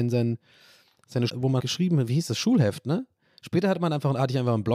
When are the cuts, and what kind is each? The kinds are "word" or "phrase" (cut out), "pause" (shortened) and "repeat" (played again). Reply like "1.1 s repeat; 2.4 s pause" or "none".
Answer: 1.3 s phrase; 1.6 s word